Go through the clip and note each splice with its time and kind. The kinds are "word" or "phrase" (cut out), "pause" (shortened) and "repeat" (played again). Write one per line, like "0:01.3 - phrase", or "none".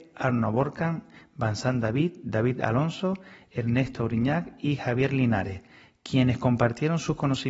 none